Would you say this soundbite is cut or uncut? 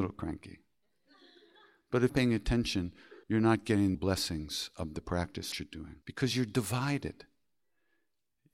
cut